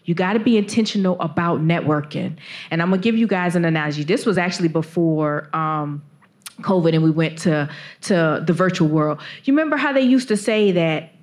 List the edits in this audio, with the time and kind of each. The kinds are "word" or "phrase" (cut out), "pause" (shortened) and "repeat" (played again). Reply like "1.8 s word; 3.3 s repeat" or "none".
none